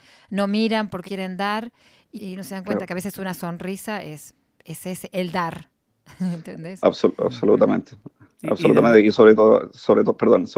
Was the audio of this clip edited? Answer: yes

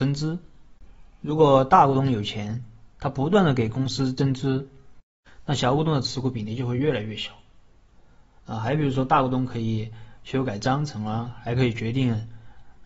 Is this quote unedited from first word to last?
yes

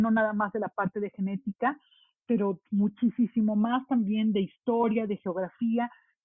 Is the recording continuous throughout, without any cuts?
yes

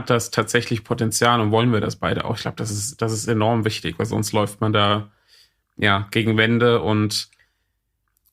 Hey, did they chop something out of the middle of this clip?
no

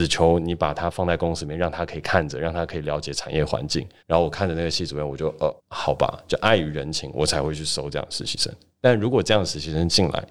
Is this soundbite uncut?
no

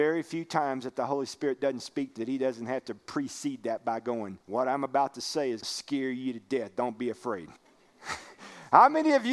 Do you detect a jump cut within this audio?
yes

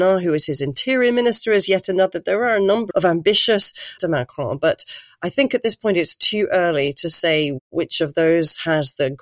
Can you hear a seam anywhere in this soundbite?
yes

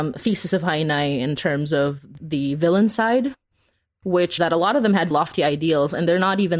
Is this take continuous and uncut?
no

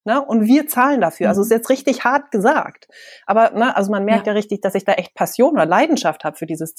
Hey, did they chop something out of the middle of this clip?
no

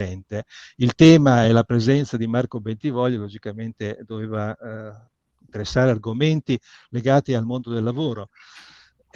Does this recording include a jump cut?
no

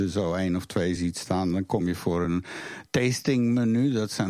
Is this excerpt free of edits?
yes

